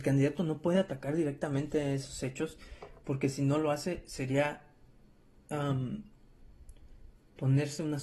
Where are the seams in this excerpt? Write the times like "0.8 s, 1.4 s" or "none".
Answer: none